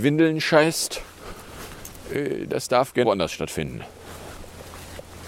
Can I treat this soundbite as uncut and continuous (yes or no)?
no